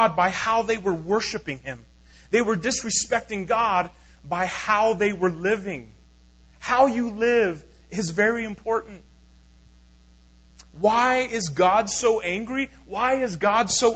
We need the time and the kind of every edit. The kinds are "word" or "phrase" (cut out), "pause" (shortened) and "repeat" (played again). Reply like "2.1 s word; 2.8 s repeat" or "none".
none